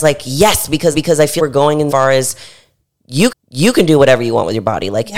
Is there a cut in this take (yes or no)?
yes